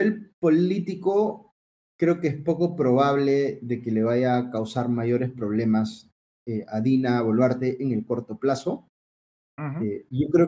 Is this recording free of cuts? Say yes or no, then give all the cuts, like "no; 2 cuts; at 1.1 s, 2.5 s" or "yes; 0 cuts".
yes; 0 cuts